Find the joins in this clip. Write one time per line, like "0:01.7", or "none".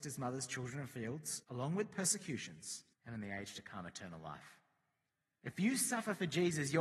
0:01.4
0:02.9
0:05.1